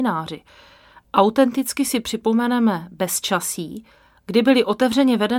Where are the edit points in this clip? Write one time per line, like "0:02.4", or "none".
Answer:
none